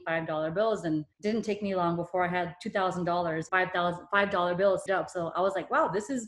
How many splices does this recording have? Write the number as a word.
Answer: three